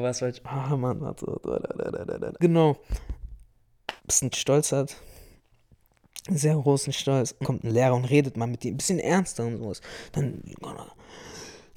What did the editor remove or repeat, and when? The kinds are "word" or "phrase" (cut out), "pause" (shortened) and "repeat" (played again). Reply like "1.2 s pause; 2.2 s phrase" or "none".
2.4 s word; 4.0 s pause; 4.3 s phrase; 7.4 s word